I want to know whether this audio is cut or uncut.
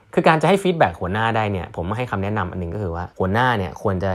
cut